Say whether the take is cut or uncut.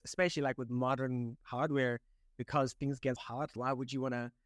cut